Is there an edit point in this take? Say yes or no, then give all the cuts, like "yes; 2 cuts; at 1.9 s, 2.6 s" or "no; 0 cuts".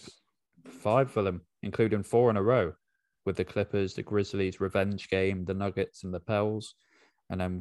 no; 0 cuts